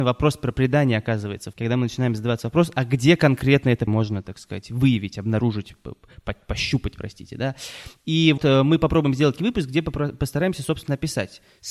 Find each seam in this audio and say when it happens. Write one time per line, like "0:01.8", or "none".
0:01.5
0:03.9
0:08.4
0:09.4